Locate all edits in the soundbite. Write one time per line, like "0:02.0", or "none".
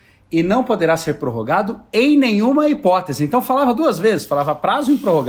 none